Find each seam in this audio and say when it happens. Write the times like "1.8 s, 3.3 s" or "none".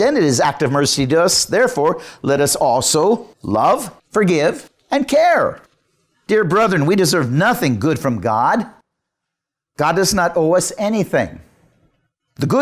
none